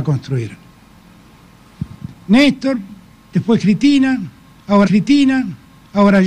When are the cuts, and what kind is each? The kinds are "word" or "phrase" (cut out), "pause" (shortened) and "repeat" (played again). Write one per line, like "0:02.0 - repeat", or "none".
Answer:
0:04.9 - repeat